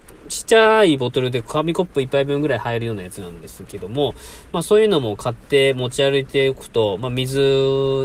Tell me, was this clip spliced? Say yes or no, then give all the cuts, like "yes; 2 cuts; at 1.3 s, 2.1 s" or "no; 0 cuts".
no; 0 cuts